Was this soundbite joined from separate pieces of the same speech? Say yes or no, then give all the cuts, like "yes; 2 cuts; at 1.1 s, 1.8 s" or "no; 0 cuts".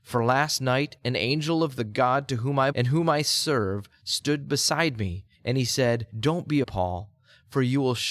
yes; 4 cuts; at 2.7 s, 5.3 s, 6.1 s, 6.6 s